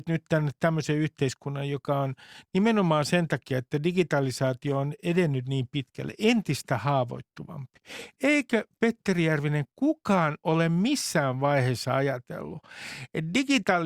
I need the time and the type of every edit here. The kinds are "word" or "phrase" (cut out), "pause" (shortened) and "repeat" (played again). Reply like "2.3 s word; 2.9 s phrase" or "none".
none